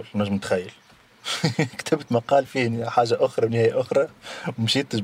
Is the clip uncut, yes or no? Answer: yes